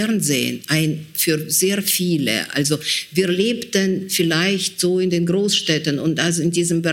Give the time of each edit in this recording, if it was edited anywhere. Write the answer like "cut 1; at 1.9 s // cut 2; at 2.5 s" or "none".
none